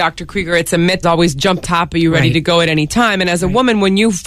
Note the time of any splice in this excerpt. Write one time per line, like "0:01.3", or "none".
0:01.0
0:01.6